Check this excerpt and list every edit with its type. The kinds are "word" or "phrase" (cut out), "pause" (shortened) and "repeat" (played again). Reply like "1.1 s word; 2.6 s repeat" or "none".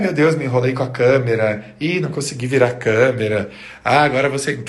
none